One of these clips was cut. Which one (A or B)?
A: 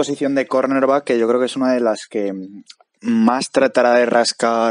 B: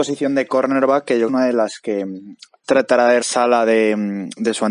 B